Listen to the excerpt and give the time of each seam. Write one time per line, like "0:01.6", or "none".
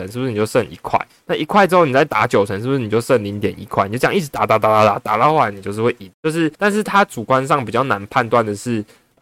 0:06.1
0:06.5